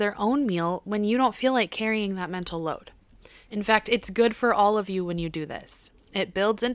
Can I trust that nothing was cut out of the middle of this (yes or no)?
yes